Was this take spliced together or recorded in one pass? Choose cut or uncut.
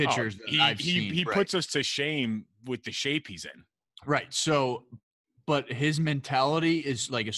uncut